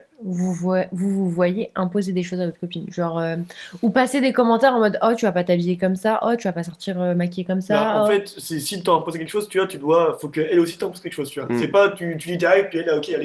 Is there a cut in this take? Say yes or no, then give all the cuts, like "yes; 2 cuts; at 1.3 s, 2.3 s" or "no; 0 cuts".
no; 0 cuts